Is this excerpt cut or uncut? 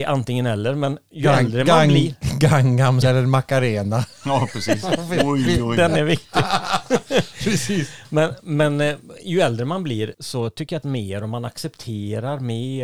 cut